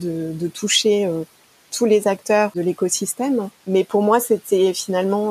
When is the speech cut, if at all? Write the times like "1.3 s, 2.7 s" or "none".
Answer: none